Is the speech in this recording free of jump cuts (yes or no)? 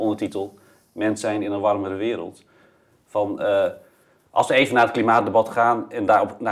yes